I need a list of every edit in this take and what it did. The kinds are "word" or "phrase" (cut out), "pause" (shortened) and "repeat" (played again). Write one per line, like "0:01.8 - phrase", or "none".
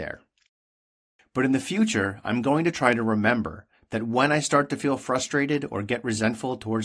none